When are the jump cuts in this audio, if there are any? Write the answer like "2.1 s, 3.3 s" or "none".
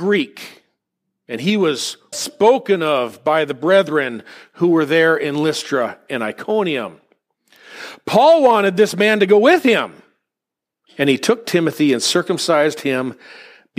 2.1 s